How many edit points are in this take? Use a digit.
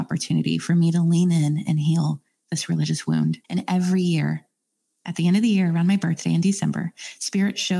1